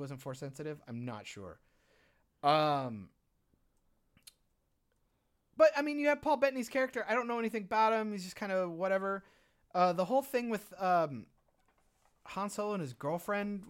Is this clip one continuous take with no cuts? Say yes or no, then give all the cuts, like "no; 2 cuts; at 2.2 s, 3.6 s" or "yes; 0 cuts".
yes; 0 cuts